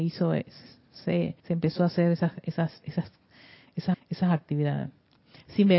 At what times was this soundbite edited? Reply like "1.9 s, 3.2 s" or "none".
1.4 s, 3.9 s